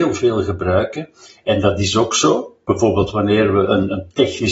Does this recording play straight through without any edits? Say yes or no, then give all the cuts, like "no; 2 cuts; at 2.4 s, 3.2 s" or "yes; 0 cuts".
yes; 0 cuts